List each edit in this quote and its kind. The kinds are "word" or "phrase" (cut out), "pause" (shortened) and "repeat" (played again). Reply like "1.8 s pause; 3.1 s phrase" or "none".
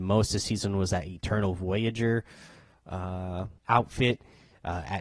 3.6 s pause